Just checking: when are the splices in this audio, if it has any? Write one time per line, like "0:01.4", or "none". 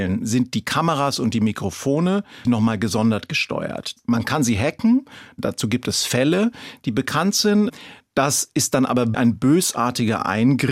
0:02.4
0:09.1